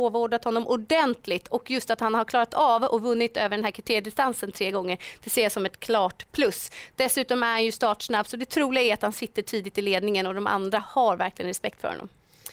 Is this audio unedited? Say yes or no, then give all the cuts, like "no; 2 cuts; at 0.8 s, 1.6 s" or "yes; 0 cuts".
yes; 0 cuts